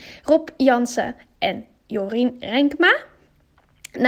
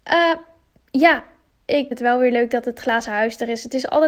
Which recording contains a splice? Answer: second; 1 cut; at 1.9 s

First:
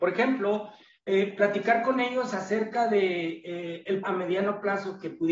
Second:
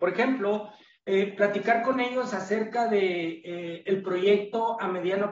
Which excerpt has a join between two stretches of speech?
first; 1 cut; at 4.0 s

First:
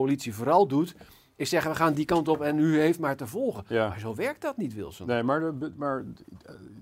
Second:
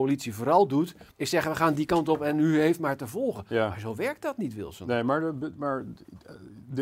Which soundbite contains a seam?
second; 1 cut; at 1.1 s

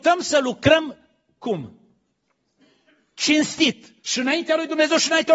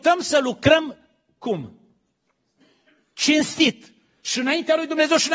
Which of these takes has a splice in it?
first; 1 cut; at 4.0 s

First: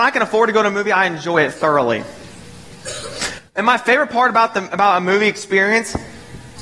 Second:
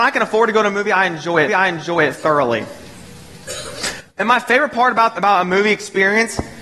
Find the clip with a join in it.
second; 2 cuts; at 1.5 s, 5.1 s

